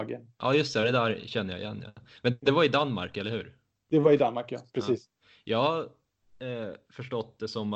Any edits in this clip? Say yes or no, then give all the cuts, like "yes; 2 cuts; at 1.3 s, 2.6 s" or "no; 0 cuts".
no; 0 cuts